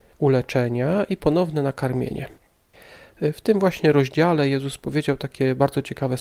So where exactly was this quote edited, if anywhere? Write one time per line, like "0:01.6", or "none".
none